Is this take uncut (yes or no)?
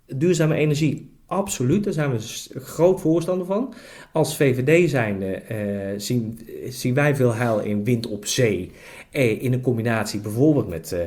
yes